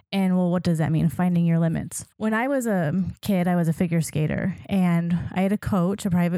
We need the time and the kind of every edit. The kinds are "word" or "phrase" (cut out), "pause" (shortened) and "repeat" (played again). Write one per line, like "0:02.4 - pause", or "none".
0:02.1 - pause